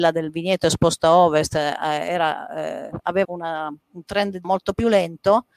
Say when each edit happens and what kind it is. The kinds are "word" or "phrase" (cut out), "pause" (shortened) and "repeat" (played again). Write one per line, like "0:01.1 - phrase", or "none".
0:03.2 - word
0:03.8 - pause
0:04.4 - word